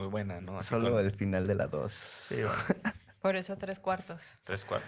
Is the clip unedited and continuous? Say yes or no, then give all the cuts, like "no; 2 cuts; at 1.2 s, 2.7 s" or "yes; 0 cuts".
yes; 0 cuts